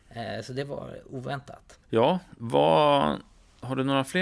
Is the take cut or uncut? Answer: cut